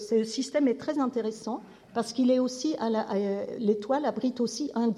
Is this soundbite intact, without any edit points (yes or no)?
yes